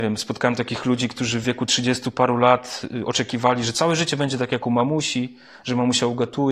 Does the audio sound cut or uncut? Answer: uncut